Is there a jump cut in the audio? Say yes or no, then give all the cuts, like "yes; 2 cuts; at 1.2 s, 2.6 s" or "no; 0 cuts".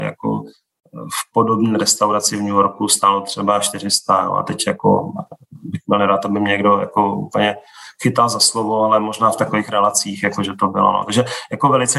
no; 0 cuts